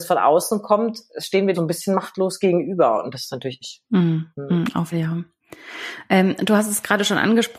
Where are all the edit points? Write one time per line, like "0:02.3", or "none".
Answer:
0:01.5
0:03.6
0:04.3
0:04.9